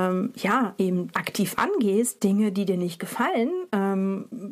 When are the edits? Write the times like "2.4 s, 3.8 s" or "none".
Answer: 1.1 s